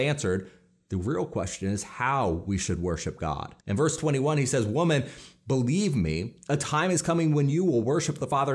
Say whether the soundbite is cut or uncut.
cut